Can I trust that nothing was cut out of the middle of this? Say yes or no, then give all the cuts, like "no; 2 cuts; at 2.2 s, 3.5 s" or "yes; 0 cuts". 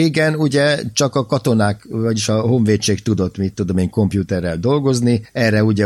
yes; 0 cuts